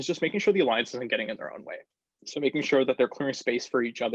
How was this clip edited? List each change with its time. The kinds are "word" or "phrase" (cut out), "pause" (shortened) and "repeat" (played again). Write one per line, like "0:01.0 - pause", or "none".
0:01.9 - pause